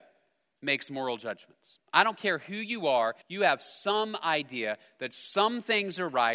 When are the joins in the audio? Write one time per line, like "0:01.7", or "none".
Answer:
0:03.2